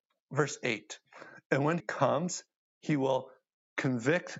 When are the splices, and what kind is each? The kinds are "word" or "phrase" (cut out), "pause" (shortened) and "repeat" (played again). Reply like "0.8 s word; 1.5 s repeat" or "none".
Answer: 1.8 s word